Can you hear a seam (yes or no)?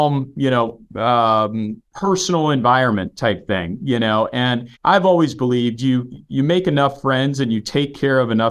yes